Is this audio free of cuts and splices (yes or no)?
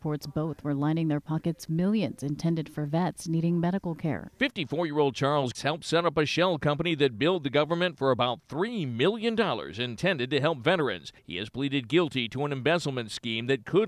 no